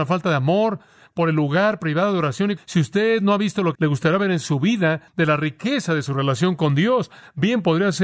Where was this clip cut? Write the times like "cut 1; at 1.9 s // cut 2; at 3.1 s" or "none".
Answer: cut 1; at 2.6 s // cut 2; at 3.7 s // cut 3; at 5.1 s